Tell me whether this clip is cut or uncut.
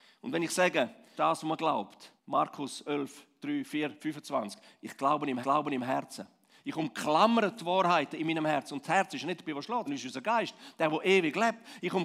cut